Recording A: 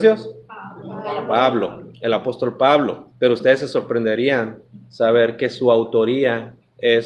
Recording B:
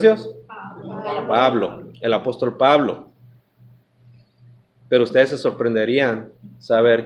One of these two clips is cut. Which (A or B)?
A